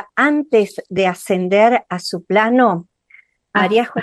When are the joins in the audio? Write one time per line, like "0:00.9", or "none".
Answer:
none